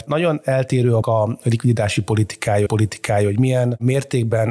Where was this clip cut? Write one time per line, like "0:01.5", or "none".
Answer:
0:01.0
0:02.7